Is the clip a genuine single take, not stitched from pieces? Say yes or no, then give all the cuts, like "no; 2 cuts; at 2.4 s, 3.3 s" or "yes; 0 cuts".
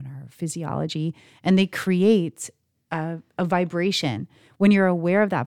yes; 0 cuts